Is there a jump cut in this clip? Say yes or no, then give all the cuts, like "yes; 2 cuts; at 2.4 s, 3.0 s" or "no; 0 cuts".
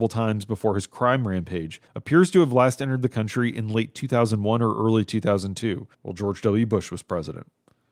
yes; 2 cuts; at 1.9 s, 5.9 s